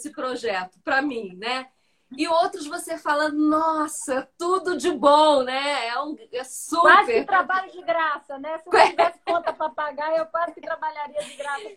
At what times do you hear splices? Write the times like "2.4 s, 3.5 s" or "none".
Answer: none